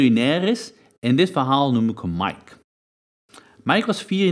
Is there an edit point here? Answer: no; 0 cuts

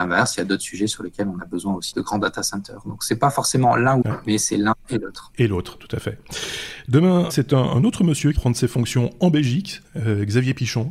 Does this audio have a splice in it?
yes; 4 cuts; at 1.9 s, 4.0 s, 7.3 s, 8.3 s

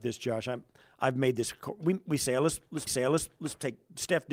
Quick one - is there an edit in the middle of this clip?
yes; 1 cut; at 2.9 s

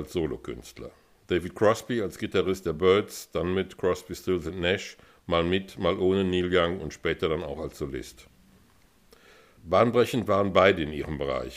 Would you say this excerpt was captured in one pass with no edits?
yes; 0 cuts

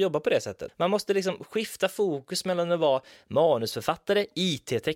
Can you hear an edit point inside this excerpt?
no; 0 cuts

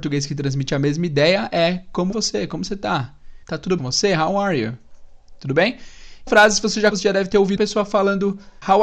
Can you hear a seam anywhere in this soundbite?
yes; 6 cuts; at 2.1 s, 3.4 s, 3.8 s, 6.3 s, 6.9 s, 7.6 s

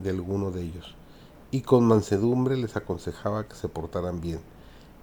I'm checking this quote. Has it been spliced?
no; 0 cuts

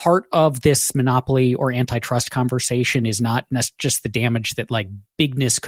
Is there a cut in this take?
no; 0 cuts

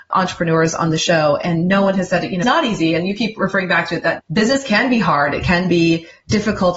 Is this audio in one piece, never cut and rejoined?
no; 2 cuts; at 2.4 s, 4.2 s

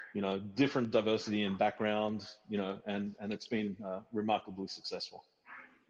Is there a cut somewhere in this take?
no; 0 cuts

